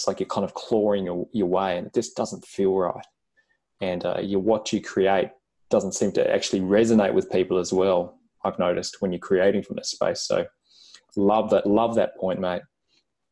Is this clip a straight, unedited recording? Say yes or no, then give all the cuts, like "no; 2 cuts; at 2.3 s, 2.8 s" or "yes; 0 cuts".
yes; 0 cuts